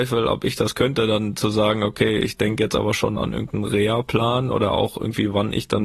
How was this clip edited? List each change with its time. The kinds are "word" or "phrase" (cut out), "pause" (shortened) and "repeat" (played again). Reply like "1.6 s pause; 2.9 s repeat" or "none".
none